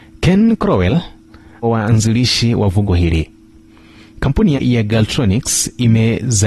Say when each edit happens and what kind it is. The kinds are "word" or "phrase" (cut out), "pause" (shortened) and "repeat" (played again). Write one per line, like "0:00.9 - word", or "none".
0:01.6 - phrase
0:02.9 - word
0:04.6 - word